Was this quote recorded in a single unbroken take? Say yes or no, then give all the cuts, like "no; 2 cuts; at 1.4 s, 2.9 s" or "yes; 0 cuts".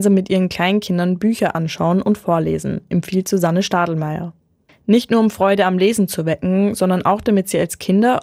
yes; 0 cuts